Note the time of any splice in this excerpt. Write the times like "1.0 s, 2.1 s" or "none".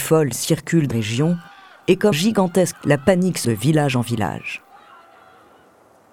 0.9 s, 2.1 s, 2.7 s, 3.4 s